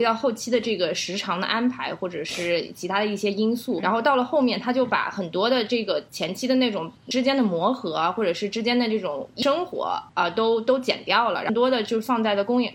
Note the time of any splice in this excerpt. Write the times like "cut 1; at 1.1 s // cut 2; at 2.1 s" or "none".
cut 1; at 3.8 s // cut 2; at 10.1 s